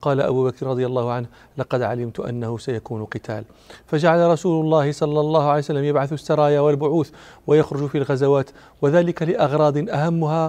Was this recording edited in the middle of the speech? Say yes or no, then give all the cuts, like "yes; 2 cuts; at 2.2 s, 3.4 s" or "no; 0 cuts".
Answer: no; 0 cuts